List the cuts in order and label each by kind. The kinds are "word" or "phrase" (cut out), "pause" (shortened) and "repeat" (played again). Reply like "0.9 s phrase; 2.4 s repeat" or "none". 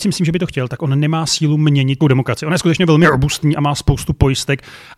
2.0 s phrase